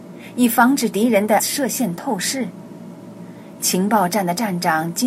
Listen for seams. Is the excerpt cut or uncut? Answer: cut